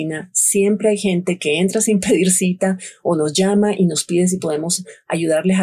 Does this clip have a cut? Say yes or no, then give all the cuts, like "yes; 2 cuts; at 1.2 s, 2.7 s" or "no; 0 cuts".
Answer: no; 0 cuts